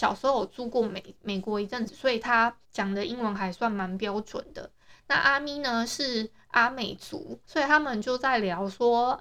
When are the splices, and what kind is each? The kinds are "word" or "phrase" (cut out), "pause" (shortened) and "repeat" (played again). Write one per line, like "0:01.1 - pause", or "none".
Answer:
0:02.6 - pause
0:07.4 - pause